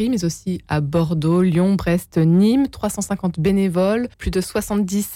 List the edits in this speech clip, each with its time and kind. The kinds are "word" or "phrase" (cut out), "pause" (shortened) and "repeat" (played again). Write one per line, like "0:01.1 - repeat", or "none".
0:04.1 - pause